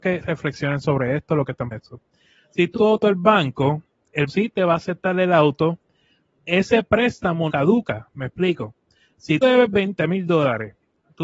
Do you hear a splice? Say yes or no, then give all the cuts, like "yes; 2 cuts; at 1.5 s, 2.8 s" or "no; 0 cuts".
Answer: yes; 6 cuts; at 1.7 s, 2.8 s, 4.3 s, 6.4 s, 7.5 s, 9.4 s